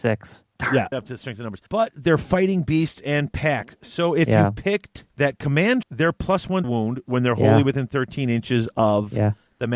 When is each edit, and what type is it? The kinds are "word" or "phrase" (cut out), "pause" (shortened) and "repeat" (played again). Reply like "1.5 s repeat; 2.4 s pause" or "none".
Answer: 0.9 s phrase; 1.7 s pause; 5.1 s pause; 5.8 s word; 6.6 s phrase